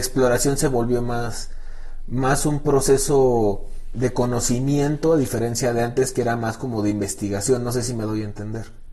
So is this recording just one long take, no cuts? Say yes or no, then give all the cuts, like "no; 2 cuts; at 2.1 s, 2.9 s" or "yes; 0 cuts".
no; 1 cut; at 3.9 s